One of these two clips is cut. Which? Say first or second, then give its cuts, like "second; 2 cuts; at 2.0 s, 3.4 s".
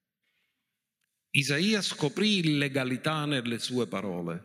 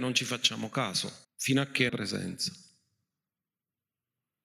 second; 2 cuts; at 1.2 s, 1.9 s